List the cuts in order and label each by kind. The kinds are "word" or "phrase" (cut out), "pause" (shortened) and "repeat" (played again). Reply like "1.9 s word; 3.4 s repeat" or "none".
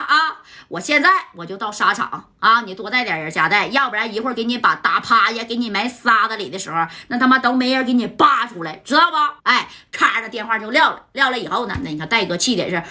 9.4 s pause